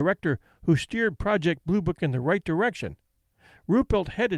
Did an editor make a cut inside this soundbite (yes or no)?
no